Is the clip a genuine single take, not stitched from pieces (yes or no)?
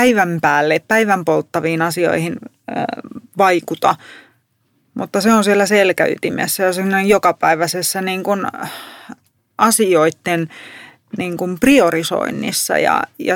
yes